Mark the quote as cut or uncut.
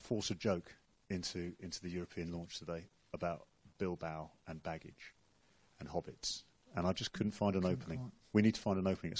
uncut